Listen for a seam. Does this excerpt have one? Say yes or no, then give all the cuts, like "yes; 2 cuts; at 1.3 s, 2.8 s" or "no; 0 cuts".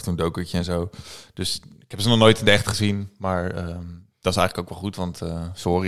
no; 0 cuts